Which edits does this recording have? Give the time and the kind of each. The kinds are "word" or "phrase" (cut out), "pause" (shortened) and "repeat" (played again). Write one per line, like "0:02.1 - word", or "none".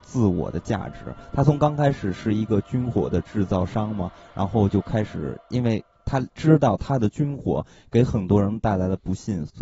none